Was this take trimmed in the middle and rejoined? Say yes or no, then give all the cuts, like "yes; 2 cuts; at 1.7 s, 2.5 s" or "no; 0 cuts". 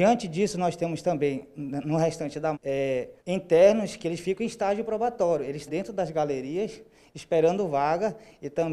yes; 3 cuts; at 2.5 s, 3.2 s, 5.7 s